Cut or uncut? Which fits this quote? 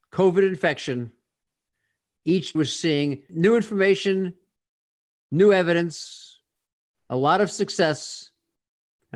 cut